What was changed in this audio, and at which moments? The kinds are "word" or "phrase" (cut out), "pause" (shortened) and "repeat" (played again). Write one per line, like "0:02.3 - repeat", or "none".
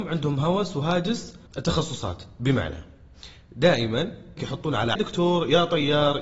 0:01.5 - pause
0:04.4 - word
0:04.9 - phrase